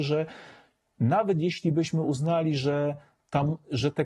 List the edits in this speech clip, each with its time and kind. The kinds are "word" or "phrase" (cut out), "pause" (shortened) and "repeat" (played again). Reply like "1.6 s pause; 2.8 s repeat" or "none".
none